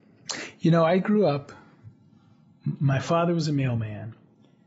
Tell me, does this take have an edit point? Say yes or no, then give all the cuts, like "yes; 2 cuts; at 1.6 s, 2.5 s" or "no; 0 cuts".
no; 0 cuts